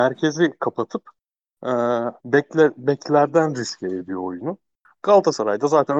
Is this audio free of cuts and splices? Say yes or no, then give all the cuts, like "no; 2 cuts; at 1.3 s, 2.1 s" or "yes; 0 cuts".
no; 1 cut; at 2.2 s